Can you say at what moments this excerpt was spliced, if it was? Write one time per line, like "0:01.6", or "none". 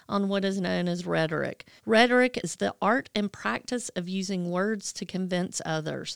0:01.8